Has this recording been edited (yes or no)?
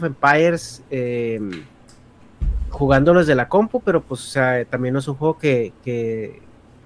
no